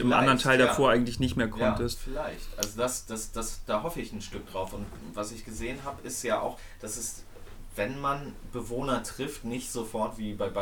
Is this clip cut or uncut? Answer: uncut